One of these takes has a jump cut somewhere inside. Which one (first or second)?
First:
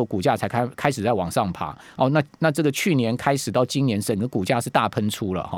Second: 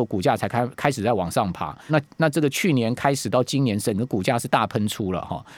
second